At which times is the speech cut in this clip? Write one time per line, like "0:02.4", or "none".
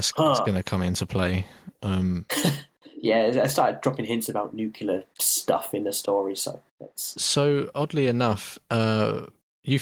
none